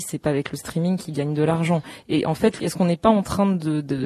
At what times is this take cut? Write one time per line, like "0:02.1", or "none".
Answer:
0:02.6